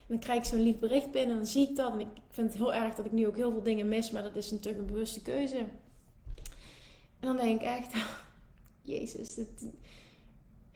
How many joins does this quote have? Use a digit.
0